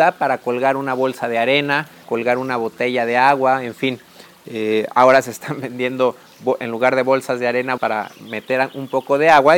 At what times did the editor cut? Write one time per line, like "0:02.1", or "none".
0:02.0
0:07.8